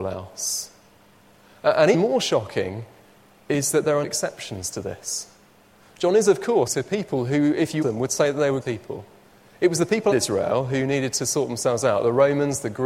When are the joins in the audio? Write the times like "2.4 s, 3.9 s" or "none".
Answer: 1.9 s, 4.0 s, 6.7 s, 7.8 s, 8.6 s, 10.1 s